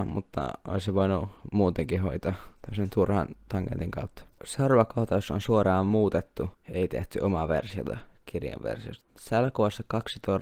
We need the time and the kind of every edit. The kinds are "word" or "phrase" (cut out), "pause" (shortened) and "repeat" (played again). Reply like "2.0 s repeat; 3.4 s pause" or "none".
2.6 s pause; 9.1 s pause